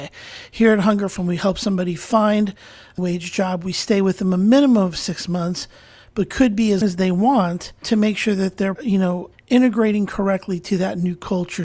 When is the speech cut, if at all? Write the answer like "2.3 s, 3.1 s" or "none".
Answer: 1.2 s, 3.0 s, 6.8 s, 7.8 s, 8.8 s, 9.3 s